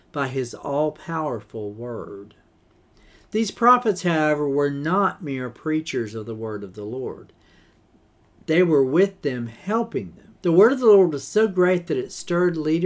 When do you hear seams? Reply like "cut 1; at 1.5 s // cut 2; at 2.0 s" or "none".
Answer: cut 1; at 10.3 s